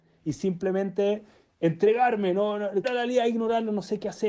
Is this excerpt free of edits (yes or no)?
no